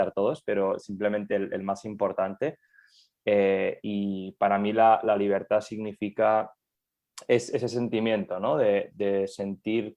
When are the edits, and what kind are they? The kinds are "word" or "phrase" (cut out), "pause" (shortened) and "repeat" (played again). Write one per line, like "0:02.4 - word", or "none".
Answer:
none